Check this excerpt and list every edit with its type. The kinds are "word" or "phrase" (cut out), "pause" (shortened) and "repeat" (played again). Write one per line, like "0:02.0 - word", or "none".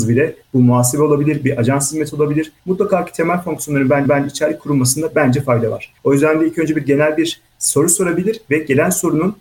0:04.1 - repeat